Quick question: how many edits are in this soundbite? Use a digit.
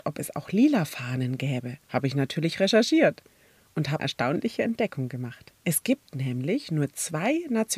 3